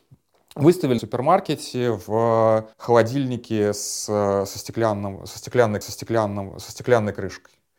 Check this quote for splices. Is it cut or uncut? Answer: cut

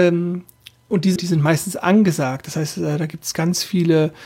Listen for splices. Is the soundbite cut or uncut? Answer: cut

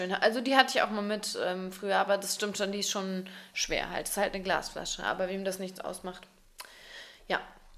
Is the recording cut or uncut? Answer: uncut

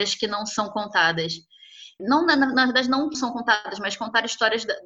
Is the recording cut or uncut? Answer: cut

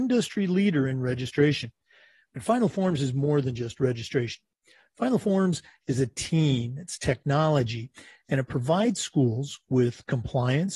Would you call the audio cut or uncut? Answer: uncut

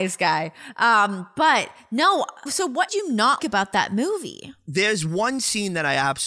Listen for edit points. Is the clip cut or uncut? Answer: cut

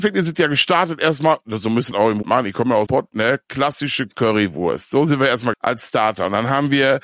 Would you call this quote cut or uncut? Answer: cut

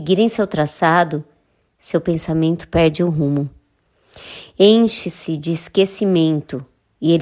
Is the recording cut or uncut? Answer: uncut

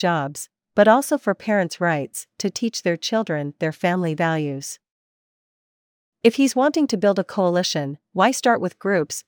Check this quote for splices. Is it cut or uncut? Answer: uncut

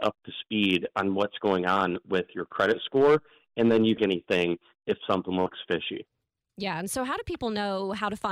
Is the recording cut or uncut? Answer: cut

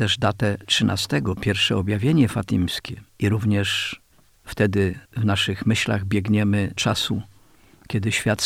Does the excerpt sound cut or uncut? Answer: cut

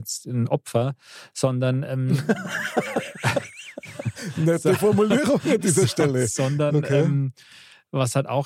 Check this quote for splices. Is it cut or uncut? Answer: uncut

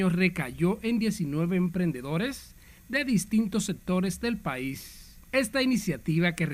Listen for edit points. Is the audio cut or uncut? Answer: uncut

